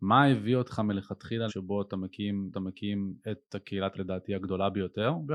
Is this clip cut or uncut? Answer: cut